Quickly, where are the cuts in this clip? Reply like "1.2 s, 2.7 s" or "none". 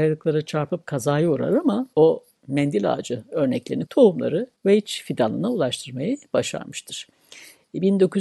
1.9 s, 3.9 s, 4.6 s